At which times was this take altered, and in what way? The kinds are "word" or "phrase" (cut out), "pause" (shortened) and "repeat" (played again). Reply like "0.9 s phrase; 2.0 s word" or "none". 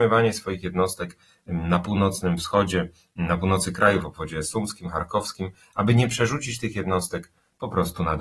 none